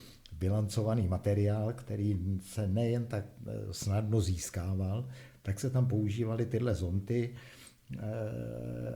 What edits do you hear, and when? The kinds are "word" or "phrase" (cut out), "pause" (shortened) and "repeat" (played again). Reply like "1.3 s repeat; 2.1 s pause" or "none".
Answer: none

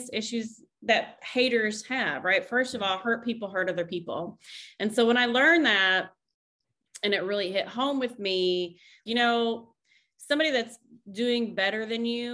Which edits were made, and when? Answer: 9.1 s word

